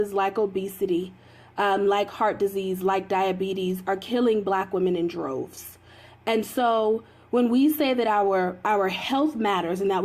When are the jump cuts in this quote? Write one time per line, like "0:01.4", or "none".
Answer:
none

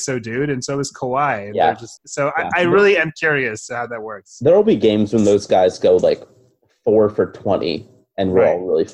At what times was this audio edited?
0:02.0

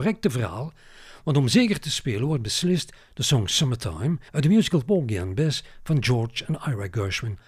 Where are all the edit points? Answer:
0:04.3

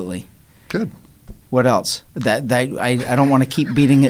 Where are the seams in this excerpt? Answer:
0:01.4

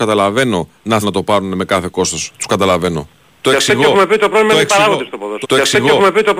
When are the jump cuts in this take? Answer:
0:01.0
0:05.4

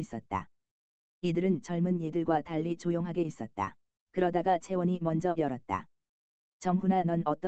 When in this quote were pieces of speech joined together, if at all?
0:03.9
0:05.3

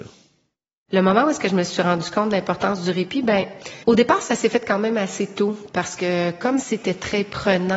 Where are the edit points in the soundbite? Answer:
0:03.8

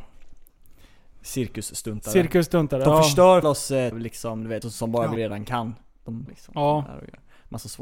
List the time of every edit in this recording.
0:03.4
0:03.9
0:04.6
0:05.2
0:06.3

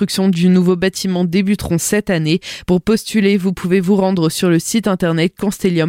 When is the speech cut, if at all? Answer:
none

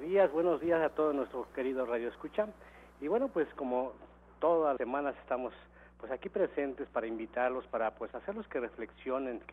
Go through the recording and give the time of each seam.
0:04.8

